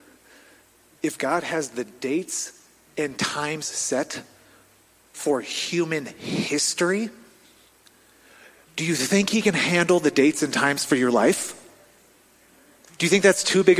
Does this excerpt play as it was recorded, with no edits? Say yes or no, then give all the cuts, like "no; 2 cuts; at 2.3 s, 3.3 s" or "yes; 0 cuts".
yes; 0 cuts